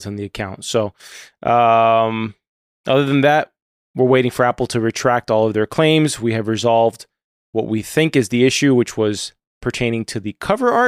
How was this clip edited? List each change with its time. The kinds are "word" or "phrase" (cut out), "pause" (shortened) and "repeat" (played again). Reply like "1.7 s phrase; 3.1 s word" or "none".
none